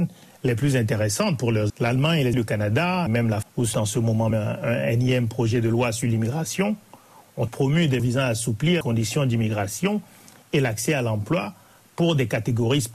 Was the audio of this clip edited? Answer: yes; 9 cuts; at 1.7 s, 2.3 s, 3.1 s, 3.4 s, 3.7 s, 4.3 s, 7.5 s, 8.0 s, 8.8 s

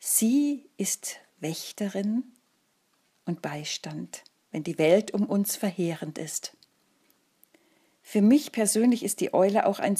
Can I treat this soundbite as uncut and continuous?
yes; 0 cuts

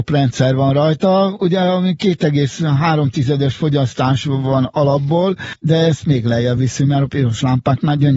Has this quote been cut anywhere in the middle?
no; 0 cuts

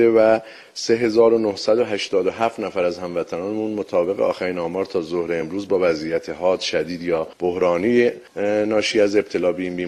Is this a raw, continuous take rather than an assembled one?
yes; 0 cuts

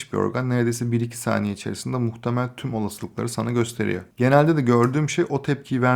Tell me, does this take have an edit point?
no; 0 cuts

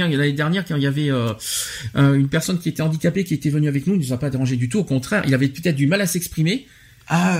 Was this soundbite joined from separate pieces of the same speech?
no; 0 cuts

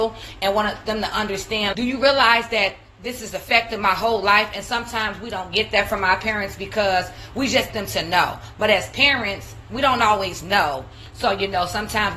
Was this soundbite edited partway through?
yes; 2 cuts; at 1.7 s, 7.7 s

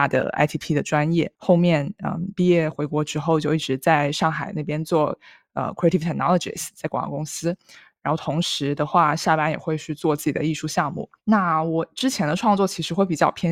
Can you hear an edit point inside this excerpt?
yes; 2 cuts; at 1.3 s, 11.2 s

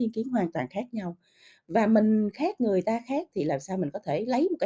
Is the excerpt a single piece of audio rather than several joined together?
yes; 0 cuts

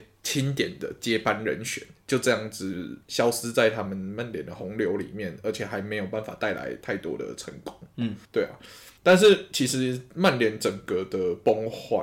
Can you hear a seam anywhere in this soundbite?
yes; 3 cuts; at 3.0 s, 8.2 s, 9.0 s

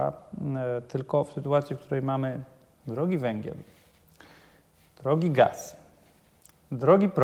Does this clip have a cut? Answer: no; 0 cuts

